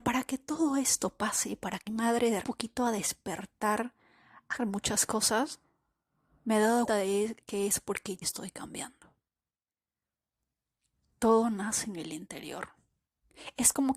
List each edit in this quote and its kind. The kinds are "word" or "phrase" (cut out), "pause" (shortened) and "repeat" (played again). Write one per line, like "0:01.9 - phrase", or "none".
0:01.9 - word
0:02.4 - phrase
0:04.6 - word
0:06.9 - word
0:07.4 - pause
0:08.2 - word